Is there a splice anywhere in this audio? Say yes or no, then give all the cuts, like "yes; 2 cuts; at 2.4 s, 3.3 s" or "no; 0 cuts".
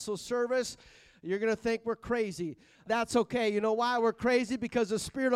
yes; 1 cut; at 2.9 s